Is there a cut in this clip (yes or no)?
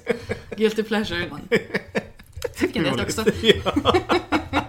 yes